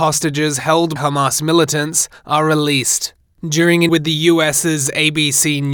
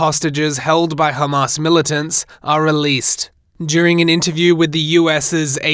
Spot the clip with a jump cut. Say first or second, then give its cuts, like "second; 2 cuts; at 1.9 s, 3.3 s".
first; 2 cuts; at 1.0 s, 3.9 s